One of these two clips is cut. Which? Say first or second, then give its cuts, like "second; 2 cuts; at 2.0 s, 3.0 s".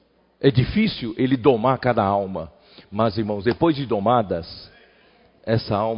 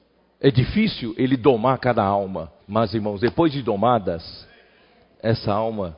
second; 1 cut; at 2.6 s